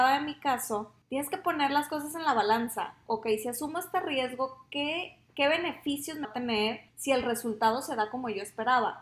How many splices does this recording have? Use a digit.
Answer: 3